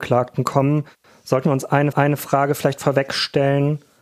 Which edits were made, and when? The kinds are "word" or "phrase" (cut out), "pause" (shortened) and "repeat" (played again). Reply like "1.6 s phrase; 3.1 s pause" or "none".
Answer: 1.0 s pause; 1.9 s repeat